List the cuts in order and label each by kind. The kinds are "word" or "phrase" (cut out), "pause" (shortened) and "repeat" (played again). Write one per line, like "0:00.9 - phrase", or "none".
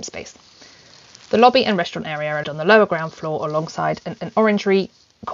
0:02.4 - word
0:04.2 - repeat

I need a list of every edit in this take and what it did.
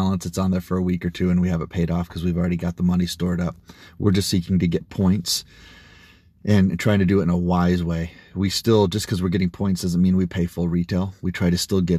none

